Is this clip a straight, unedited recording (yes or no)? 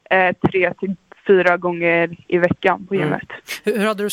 yes